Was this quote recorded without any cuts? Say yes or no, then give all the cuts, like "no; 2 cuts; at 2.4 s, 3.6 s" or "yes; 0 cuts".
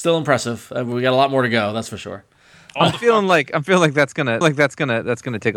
no; 1 cut; at 4.4 s